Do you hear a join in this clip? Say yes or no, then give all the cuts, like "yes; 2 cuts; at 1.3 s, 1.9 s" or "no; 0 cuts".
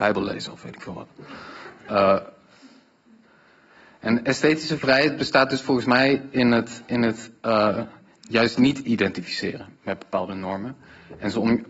no; 0 cuts